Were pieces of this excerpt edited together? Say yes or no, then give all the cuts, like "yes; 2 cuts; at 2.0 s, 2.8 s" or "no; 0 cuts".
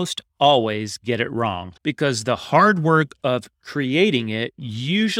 yes; 1 cut; at 1.8 s